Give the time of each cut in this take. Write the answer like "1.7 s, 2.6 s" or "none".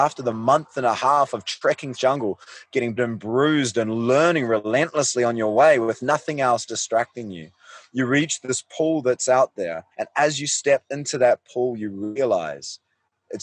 1.9 s, 3.0 s, 9.9 s